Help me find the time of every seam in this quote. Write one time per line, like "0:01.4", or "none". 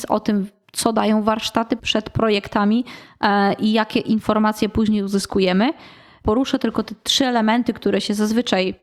0:01.8